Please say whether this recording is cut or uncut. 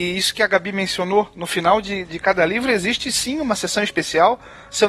uncut